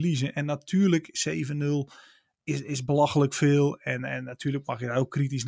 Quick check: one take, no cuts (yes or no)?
yes